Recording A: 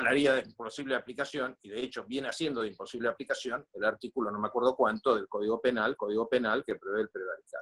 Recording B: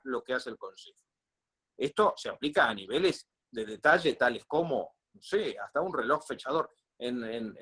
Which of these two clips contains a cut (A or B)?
A